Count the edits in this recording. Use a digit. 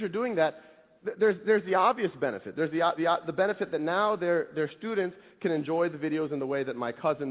1